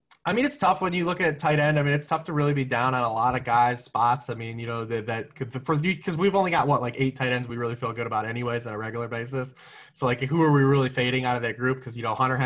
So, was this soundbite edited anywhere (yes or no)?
no